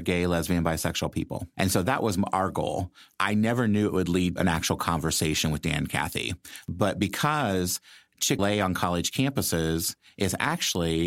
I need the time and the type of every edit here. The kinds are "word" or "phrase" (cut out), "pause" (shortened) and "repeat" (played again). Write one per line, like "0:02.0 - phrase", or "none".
0:04.4 - word
0:08.4 - word